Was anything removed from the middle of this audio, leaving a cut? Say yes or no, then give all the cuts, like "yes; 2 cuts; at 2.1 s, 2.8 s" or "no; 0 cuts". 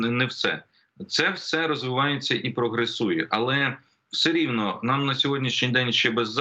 no; 0 cuts